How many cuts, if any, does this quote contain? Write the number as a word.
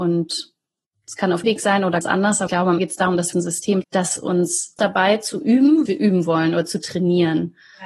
eight